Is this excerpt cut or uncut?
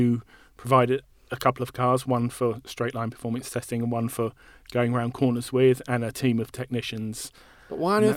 uncut